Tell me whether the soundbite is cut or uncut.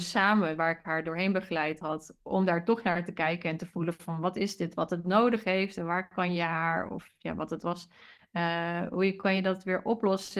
uncut